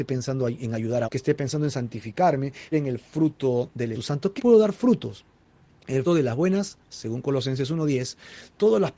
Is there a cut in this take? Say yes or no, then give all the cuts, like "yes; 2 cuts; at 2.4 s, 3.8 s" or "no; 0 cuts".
yes; 6 cuts; at 1.1 s, 2.7 s, 3.9 s, 4.4 s, 6.1 s, 6.9 s